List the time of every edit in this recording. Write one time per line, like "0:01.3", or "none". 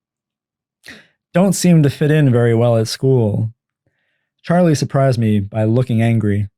none

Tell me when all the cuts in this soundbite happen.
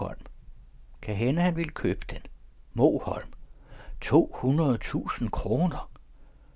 0:02.5

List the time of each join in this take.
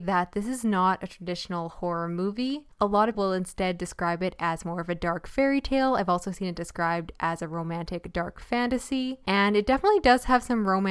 0:03.1

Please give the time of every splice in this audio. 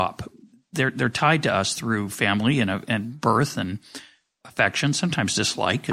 none

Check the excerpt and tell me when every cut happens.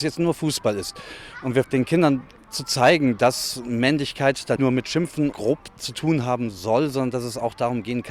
0:01.6
0:04.6
0:05.3

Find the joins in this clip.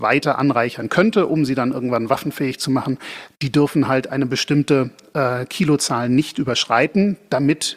none

